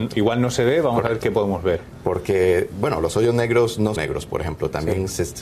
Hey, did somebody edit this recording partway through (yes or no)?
yes